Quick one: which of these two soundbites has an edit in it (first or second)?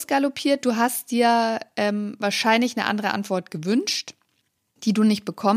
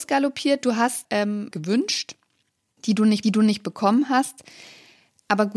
second